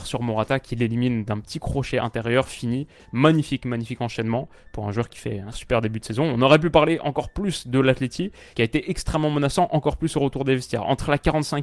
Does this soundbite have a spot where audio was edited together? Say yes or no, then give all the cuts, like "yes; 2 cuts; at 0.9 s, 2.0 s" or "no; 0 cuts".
yes; 1 cut; at 5.5 s